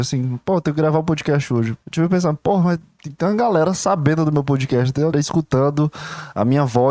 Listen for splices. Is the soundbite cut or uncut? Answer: cut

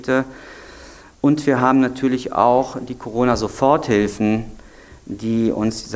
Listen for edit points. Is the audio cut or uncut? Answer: uncut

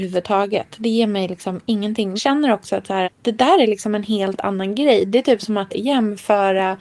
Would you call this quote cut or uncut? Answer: cut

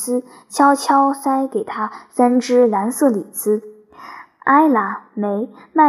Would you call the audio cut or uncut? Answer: uncut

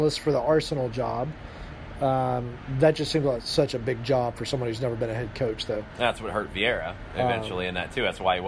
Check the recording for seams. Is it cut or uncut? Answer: uncut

